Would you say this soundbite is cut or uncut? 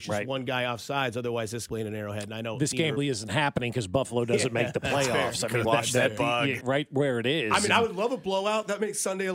cut